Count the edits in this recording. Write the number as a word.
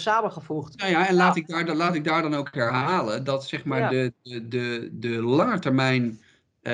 zero